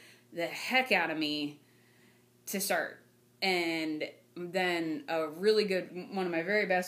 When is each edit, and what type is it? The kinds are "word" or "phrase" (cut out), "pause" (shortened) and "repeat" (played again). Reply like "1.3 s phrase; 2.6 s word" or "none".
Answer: 3.2 s pause; 5.9 s word

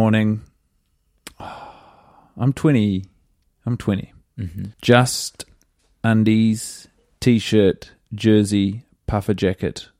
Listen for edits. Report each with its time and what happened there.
4.7 s pause

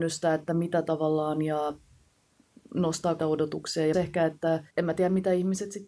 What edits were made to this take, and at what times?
3.2 s word; 3.9 s word; 4.7 s pause

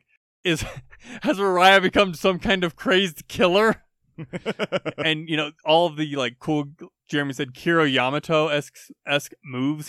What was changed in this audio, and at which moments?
7.0 s word

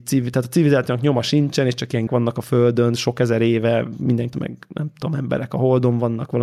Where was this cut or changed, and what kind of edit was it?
2.1 s word; 4.3 s word

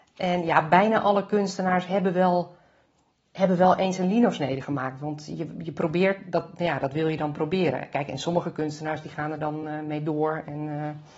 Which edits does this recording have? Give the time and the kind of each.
none

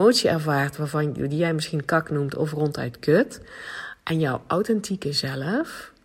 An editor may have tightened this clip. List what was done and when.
none

